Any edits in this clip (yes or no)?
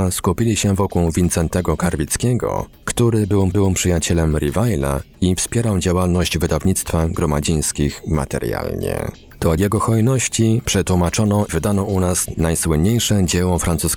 yes